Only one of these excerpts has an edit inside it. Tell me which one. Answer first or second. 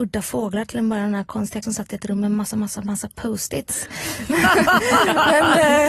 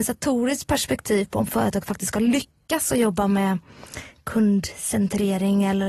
first